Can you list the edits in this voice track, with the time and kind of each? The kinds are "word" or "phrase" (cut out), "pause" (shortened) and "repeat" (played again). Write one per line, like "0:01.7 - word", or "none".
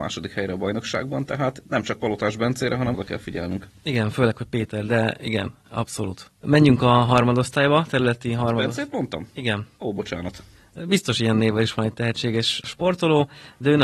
0:02.9 - phrase